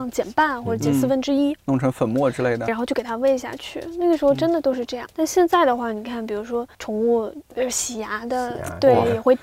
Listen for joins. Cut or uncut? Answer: cut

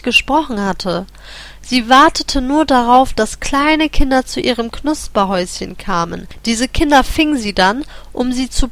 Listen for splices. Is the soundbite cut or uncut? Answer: uncut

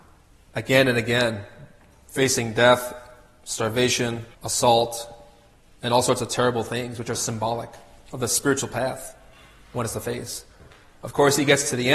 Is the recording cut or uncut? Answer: cut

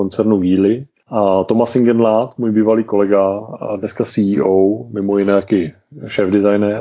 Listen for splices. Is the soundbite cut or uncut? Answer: uncut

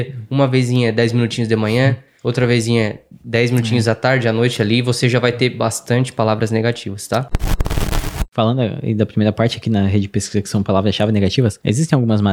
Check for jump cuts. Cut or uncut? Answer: uncut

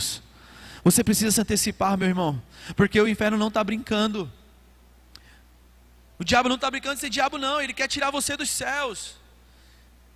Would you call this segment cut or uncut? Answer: uncut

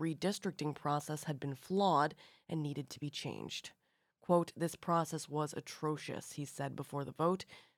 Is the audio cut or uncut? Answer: uncut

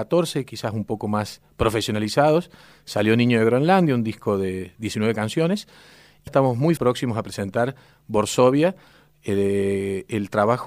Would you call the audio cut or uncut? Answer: cut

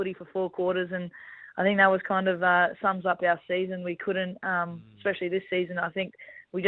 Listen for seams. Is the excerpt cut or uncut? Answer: uncut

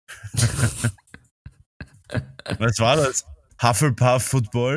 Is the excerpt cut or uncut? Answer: cut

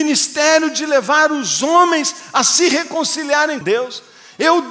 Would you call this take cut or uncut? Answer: cut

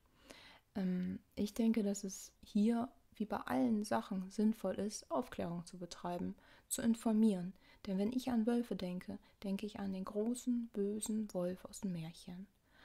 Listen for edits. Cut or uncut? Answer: cut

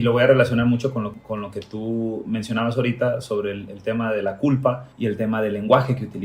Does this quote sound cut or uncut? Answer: cut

